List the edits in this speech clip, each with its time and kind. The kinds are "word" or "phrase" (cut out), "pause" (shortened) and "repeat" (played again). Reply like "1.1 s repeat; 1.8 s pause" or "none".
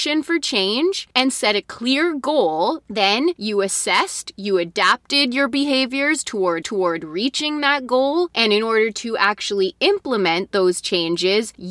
6.6 s repeat